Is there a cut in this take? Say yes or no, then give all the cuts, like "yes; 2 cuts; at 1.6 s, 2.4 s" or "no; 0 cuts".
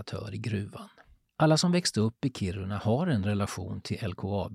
no; 0 cuts